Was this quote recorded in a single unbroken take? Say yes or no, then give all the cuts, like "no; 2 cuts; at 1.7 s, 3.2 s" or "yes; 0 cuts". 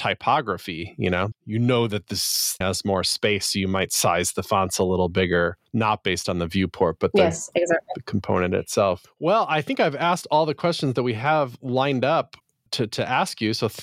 no; 4 cuts; at 1.3 s, 2.6 s, 5.7 s, 12.7 s